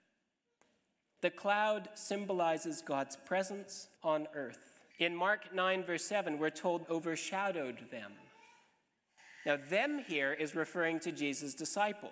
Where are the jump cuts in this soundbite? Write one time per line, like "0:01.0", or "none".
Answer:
0:04.0
0:04.9
0:06.8